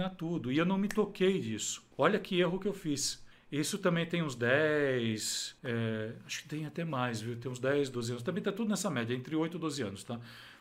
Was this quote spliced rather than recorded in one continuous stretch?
yes; 3 cuts; at 1.9 s, 3.3 s, 5.6 s

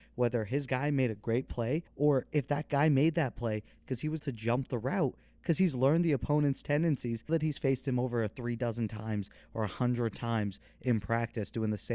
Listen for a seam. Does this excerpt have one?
yes; 3 cuts; at 1.9 s, 4.2 s, 7.3 s

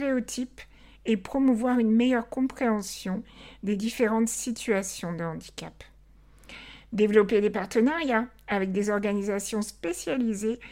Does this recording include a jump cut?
no; 0 cuts

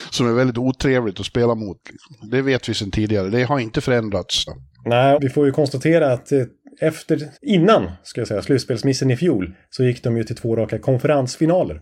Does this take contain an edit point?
yes; 3 cuts; at 4.5 s, 5.2 s, 7.4 s

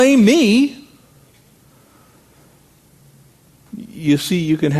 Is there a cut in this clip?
no; 0 cuts

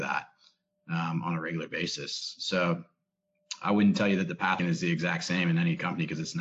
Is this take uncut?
no; 1 cut; at 4.6 s

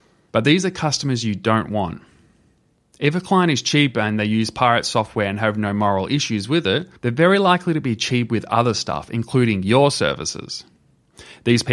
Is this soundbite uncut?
no; 1 cut; at 7.0 s

